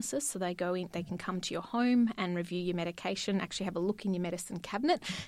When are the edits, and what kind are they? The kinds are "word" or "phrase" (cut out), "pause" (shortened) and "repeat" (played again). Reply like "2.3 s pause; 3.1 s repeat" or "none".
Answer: none

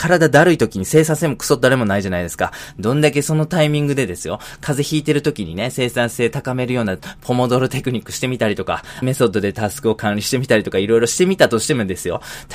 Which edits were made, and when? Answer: 9.0 s word

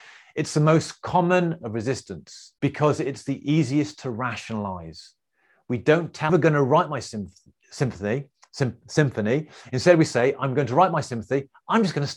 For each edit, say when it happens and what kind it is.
1.6 s word; 2.6 s pause; 6.3 s phrase

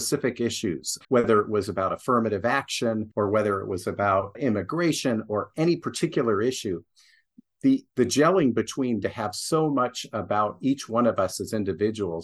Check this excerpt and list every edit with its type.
1.0 s pause; 3.1 s pause; 4.3 s word; 7.9 s pause; 9.0 s phrase

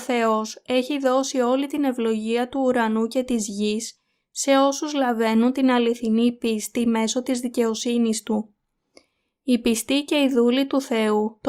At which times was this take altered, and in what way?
none

